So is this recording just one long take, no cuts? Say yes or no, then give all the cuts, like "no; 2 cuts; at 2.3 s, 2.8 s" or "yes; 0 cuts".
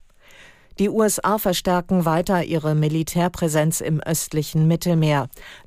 yes; 0 cuts